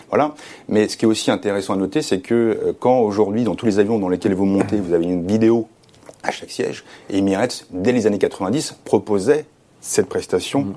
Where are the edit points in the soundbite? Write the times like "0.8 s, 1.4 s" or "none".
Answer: none